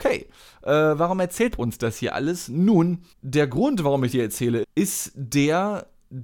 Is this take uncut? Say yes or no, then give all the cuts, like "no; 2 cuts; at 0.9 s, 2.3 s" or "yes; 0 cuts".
no; 4 cuts; at 1.5 s, 3.1 s, 4.1 s, 4.6 s